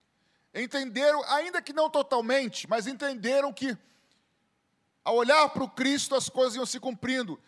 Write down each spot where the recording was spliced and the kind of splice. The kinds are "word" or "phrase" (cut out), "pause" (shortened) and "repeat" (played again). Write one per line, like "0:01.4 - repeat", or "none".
none